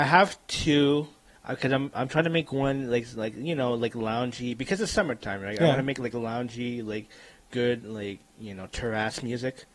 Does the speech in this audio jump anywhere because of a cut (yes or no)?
no